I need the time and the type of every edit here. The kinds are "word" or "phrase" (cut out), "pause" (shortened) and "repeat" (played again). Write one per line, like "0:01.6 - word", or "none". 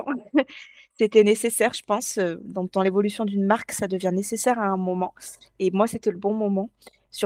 none